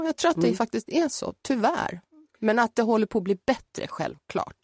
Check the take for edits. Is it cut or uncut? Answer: uncut